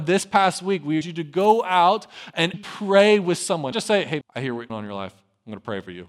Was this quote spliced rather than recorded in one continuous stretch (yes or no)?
yes